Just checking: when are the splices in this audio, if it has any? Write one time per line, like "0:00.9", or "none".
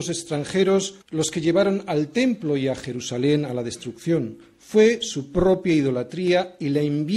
0:01.0